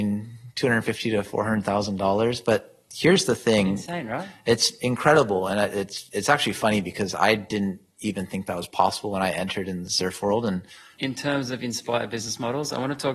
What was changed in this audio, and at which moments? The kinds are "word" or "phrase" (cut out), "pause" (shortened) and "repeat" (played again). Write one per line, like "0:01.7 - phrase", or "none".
none